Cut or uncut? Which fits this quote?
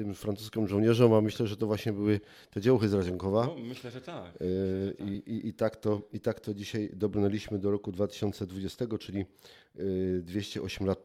uncut